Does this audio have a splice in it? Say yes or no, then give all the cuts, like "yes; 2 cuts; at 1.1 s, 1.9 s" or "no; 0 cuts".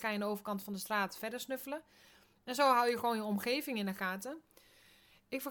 no; 0 cuts